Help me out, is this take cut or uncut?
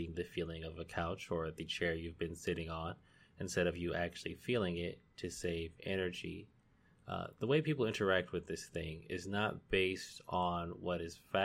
uncut